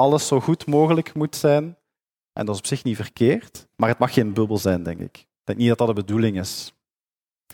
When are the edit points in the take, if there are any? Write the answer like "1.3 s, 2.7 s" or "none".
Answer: 3.7 s

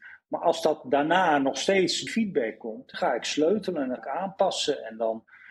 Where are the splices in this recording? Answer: 2.1 s, 2.9 s, 4.0 s

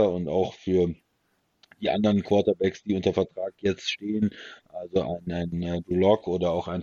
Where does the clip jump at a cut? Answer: none

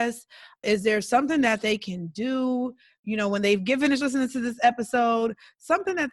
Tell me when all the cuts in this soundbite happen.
none

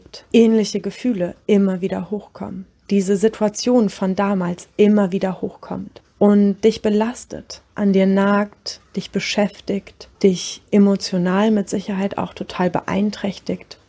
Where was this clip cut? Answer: 7.7 s, 8.9 s

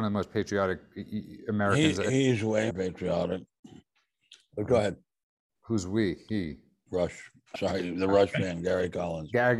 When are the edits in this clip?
2.7 s, 7.6 s

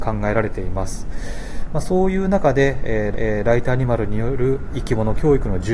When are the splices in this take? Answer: 3.1 s

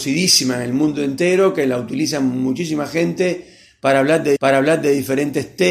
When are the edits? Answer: 4.4 s

